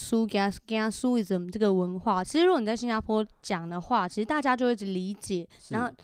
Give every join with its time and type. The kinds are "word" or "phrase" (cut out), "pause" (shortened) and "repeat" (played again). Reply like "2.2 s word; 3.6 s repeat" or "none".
none